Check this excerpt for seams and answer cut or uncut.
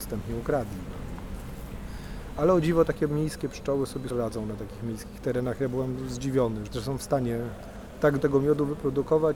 cut